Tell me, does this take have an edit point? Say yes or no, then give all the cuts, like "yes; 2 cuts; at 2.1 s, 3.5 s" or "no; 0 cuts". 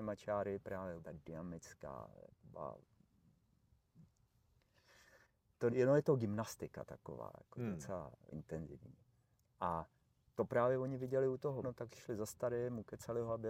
yes; 4 cuts; at 1.0 s, 5.7 s, 8.3 s, 11.6 s